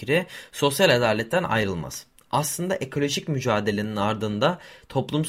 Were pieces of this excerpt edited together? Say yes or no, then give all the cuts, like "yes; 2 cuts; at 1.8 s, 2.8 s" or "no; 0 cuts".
no; 0 cuts